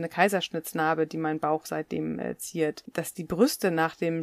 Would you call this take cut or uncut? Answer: uncut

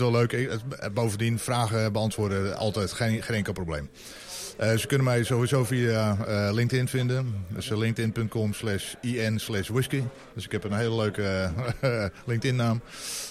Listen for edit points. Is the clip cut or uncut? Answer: cut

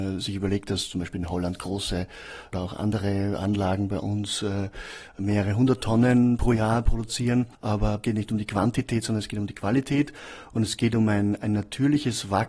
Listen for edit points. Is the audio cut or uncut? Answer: uncut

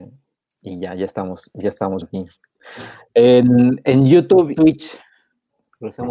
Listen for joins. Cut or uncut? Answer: cut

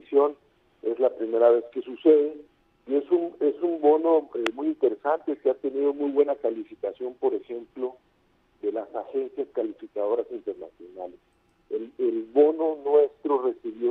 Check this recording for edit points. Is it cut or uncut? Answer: uncut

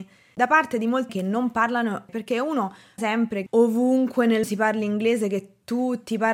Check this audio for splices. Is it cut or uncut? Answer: cut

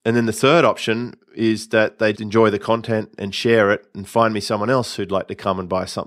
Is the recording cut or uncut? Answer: cut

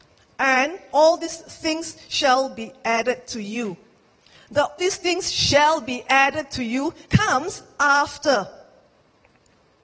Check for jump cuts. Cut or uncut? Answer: cut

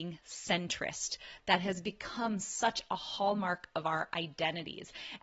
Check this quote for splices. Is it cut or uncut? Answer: uncut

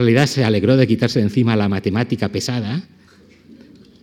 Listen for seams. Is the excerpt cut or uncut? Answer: uncut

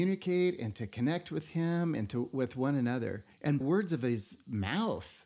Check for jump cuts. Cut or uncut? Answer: cut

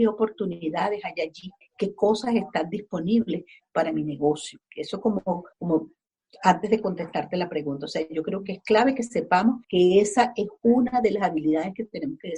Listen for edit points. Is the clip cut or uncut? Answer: cut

